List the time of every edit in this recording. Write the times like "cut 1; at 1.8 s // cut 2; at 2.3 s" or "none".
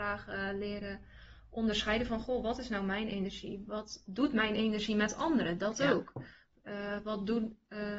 cut 1; at 4.1 s